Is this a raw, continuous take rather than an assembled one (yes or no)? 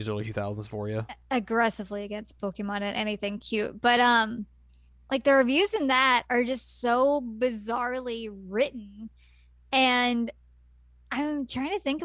yes